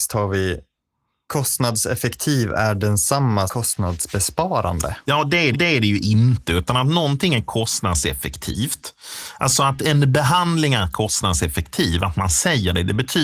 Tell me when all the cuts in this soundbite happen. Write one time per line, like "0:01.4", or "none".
0:03.5
0:05.5